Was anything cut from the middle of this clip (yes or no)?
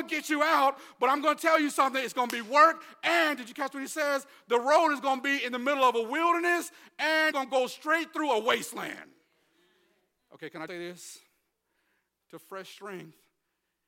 yes